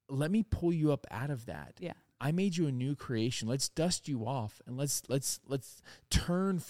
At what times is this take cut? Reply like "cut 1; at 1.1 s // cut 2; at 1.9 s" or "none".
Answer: none